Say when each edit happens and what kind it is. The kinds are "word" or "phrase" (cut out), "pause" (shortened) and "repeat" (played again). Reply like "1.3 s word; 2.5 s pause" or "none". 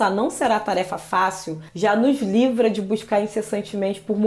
1.7 s pause